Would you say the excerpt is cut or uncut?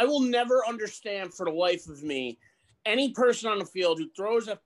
cut